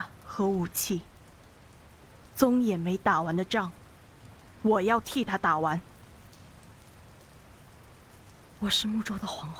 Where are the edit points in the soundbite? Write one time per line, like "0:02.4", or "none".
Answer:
none